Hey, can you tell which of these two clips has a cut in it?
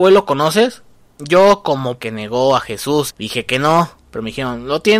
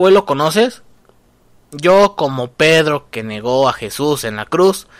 first; 3 cuts; at 1.0 s, 2.0 s, 3.1 s

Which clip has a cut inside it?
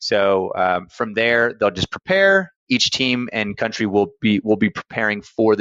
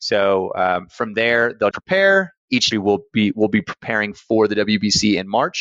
second; 2 cuts; at 1.7 s, 2.7 s

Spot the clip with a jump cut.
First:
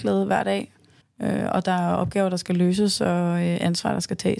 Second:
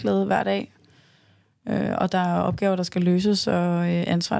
first; 1 cut; at 1.0 s

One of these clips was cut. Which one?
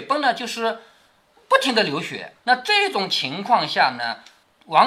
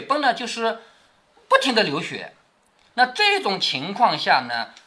first; 1 cut; at 2.4 s

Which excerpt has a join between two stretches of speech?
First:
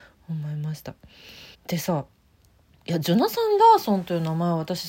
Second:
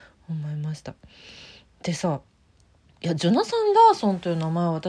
first; 1 cut; at 1.5 s

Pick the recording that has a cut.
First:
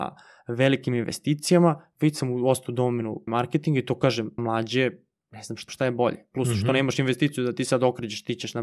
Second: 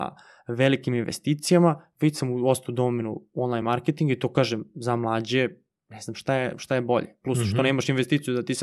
first; 3 cuts; at 3.3 s, 4.4 s, 5.7 s

